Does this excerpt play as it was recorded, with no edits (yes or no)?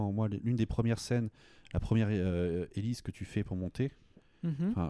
yes